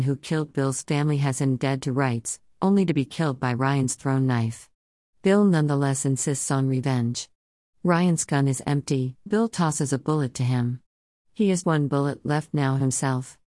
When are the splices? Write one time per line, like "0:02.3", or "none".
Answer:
0:09.3
0:11.6